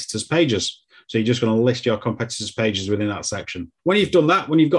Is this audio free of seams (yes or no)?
no